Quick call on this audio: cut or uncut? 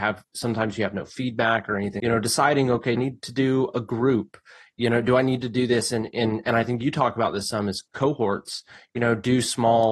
cut